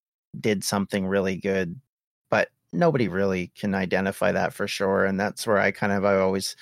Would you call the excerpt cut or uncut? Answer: uncut